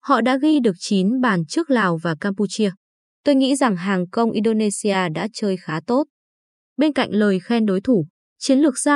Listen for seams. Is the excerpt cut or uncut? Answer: uncut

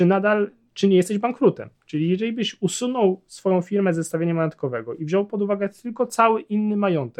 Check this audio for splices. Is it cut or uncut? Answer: uncut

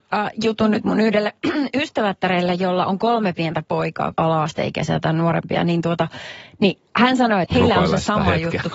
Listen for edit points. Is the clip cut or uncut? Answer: cut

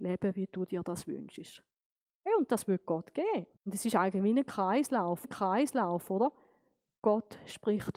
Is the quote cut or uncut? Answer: cut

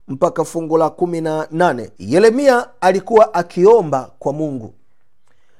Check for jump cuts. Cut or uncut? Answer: cut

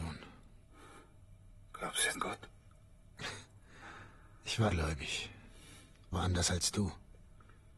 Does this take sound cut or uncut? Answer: cut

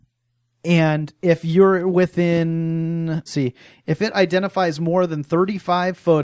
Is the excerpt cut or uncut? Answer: cut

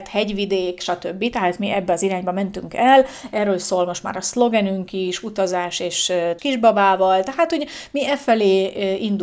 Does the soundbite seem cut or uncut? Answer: cut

